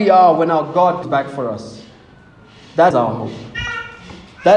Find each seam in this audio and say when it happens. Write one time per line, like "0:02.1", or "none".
0:01.0
0:02.9

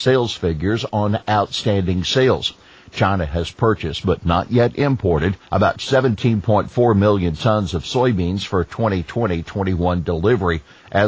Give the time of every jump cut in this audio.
0:05.5

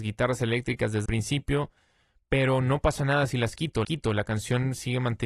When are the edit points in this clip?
0:01.1
0:03.8

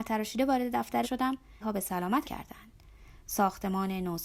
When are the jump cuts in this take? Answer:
0:01.0
0:01.6
0:02.2

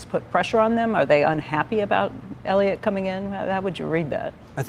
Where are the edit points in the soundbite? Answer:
none

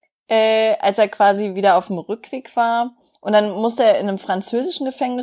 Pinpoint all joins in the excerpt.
none

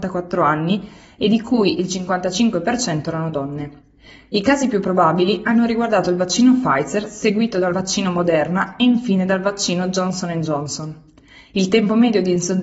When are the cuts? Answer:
none

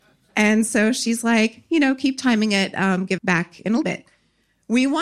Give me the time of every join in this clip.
0:03.2
0:03.8

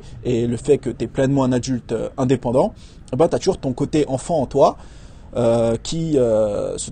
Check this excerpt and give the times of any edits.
none

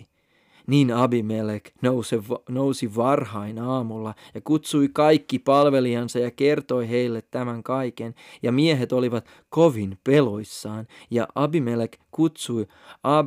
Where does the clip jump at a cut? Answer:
none

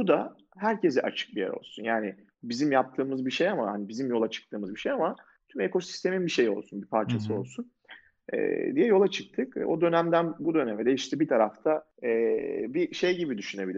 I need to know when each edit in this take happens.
none

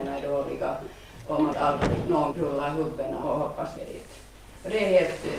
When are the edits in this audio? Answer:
0:01.5
0:02.3
0:03.2
0:03.8

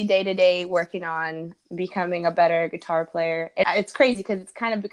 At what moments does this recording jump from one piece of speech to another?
0:01.6
0:03.6

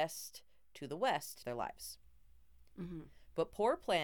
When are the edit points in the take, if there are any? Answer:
0:01.4

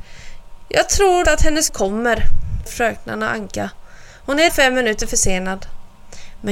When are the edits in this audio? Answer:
0:01.2
0:01.7
0:02.7
0:04.5

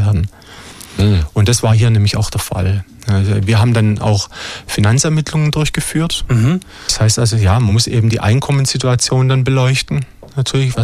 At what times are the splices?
none

